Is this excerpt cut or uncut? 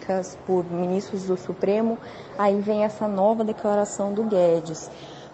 uncut